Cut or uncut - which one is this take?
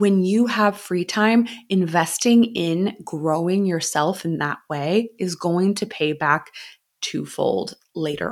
uncut